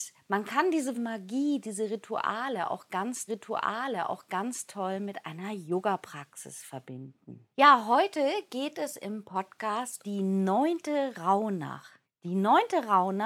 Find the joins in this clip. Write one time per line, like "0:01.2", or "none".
0:00.9
0:03.3
0:07.5
0:10.0
0:12.0